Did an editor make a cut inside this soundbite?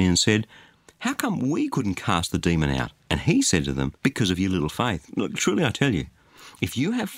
yes; 2 cuts; at 3.0 s, 4.0 s

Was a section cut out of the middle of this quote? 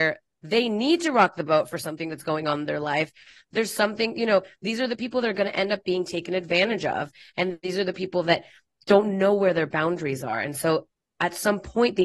no; 0 cuts

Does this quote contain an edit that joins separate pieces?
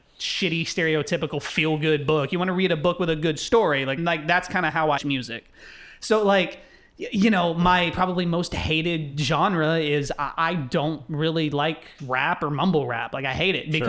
yes; 3 cuts; at 4.0 s, 5.0 s, 12.0 s

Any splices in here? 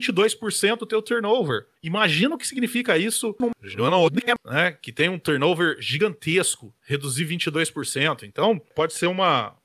no; 0 cuts

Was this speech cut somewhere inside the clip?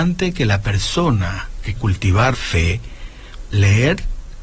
yes; 3 cuts; at 1.8 s, 2.3 s, 3.5 s

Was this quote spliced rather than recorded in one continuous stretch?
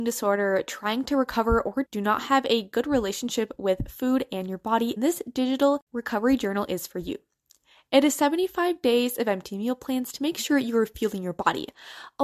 yes; 2 cuts; at 1.8 s, 5.0 s

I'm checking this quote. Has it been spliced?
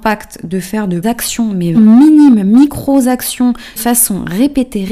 yes; 3 cuts; at 1.0 s, 1.7 s, 3.8 s

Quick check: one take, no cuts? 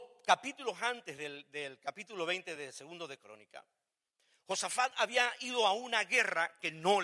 yes; 0 cuts

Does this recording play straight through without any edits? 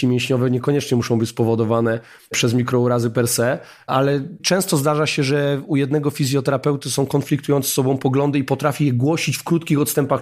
yes; 0 cuts

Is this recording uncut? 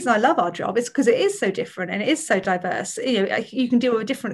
yes; 0 cuts

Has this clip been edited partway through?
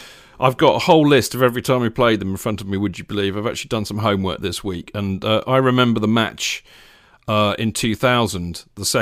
no; 0 cuts

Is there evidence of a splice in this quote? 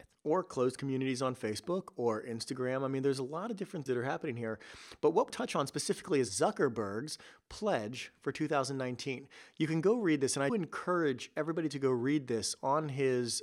yes; 3 cuts; at 3.9 s, 5.3 s, 10.5 s

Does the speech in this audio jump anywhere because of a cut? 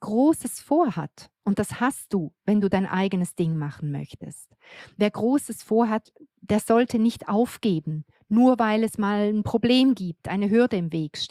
no; 0 cuts

